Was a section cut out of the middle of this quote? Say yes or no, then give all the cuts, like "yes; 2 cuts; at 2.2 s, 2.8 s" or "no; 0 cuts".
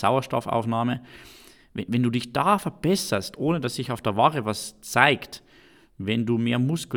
yes; 1 cut; at 1.9 s